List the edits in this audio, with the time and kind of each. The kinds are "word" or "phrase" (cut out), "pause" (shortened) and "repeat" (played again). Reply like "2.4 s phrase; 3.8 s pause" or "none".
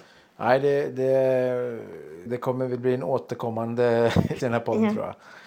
2.3 s word; 4.4 s word